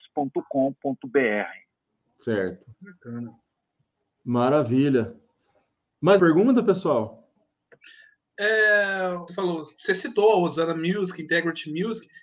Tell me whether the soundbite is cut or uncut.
cut